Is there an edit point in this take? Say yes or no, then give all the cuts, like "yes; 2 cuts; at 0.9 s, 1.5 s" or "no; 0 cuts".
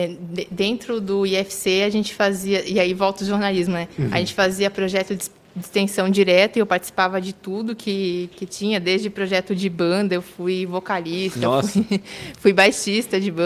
no; 0 cuts